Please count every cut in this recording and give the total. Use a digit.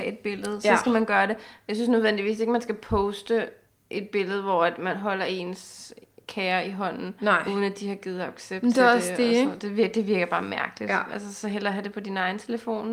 0